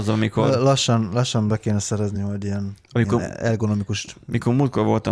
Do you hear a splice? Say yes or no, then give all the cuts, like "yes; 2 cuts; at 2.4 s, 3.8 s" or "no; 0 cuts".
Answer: no; 0 cuts